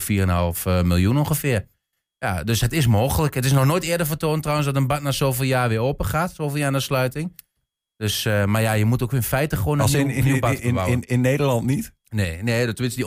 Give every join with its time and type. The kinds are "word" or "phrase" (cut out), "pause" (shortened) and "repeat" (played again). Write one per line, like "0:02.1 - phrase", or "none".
none